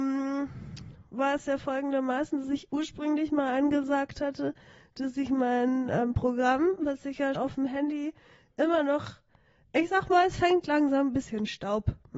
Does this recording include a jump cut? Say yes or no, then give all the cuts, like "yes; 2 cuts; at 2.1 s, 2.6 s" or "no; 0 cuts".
yes; 1 cut; at 7.4 s